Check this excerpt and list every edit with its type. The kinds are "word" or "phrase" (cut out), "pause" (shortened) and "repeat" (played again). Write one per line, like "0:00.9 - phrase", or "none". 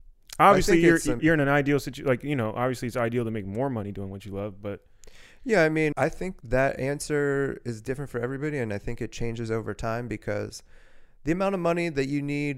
0:01.2 - word
0:05.9 - word
0:06.4 - word